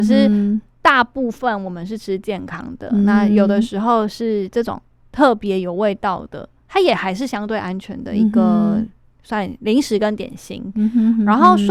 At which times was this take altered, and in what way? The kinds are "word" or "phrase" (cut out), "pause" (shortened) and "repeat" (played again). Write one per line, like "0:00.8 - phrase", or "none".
none